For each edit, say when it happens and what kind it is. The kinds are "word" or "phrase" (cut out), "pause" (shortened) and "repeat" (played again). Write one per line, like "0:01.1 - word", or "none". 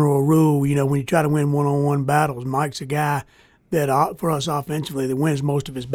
none